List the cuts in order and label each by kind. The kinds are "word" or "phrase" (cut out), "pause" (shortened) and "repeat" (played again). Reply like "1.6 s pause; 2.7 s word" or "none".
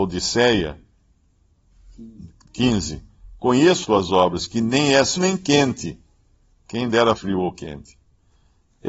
3.8 s word; 5.2 s word; 7.2 s word